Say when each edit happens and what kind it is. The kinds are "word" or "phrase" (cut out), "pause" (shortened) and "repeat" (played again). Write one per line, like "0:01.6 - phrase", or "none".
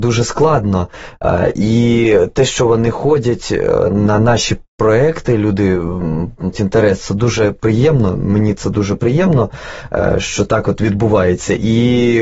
0:06.5 - word